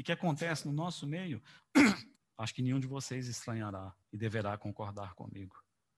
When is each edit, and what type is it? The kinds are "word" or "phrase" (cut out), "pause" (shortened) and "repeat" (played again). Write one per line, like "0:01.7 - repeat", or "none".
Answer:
0:02.2 - pause
0:04.0 - pause